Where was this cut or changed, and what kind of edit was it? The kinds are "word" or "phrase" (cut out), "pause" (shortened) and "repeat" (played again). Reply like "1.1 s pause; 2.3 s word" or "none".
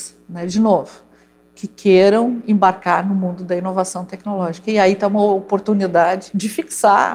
none